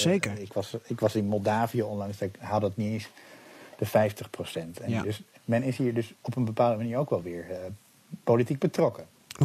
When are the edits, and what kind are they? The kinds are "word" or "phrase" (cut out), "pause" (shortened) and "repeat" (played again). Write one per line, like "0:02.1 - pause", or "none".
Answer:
none